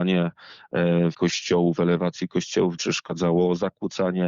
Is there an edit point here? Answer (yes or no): yes